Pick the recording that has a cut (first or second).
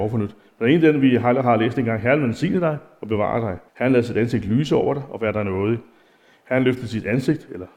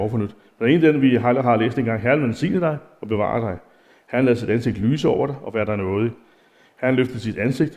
first